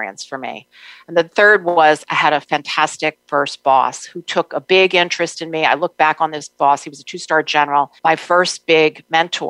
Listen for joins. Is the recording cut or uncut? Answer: cut